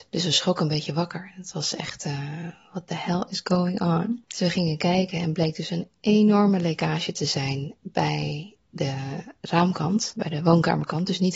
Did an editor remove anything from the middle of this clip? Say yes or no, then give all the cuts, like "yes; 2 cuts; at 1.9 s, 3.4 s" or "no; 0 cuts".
no; 0 cuts